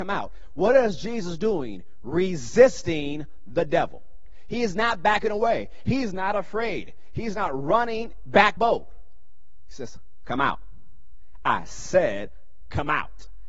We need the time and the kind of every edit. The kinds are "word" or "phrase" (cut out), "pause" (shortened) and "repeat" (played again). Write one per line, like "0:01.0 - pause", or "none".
0:08.6 - phrase